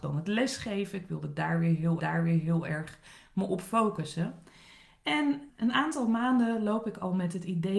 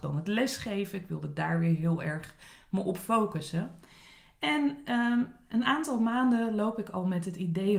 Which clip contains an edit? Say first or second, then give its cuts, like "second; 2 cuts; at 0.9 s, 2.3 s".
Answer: first; 2 cuts; at 2.0 s, 5.5 s